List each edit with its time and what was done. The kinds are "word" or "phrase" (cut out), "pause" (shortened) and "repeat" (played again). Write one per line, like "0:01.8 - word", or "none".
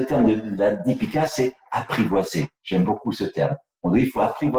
none